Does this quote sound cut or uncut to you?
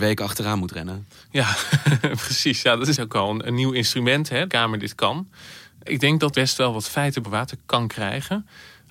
cut